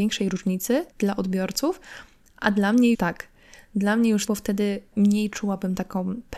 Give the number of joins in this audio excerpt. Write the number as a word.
four